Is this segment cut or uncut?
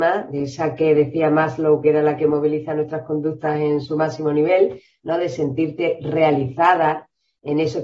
uncut